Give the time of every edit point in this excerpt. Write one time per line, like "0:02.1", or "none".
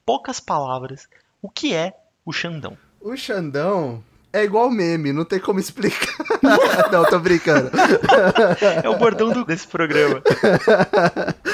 0:09.5